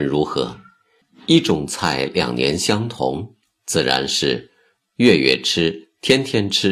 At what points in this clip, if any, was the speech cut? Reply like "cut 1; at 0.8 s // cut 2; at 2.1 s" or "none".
cut 1; at 3.4 s